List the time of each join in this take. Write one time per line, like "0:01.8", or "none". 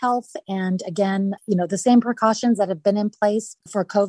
0:01.4